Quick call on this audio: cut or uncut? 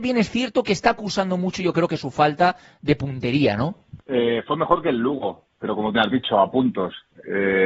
cut